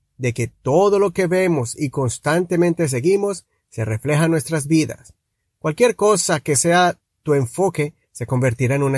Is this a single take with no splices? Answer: yes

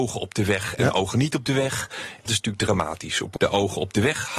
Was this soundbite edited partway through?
yes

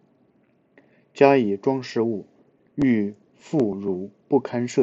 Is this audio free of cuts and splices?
yes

